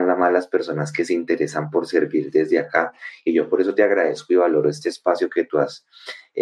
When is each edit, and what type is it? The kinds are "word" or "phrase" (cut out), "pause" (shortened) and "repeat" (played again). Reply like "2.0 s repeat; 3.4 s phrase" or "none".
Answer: none